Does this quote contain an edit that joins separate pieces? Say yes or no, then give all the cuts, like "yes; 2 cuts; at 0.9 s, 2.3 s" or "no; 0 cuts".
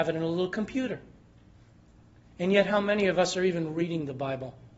no; 0 cuts